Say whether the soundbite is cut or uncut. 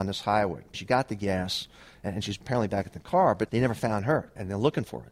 uncut